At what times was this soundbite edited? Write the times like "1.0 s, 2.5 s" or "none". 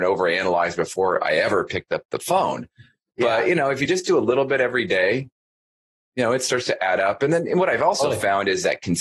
none